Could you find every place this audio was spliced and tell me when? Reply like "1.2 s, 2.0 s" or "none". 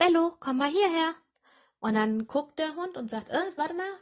none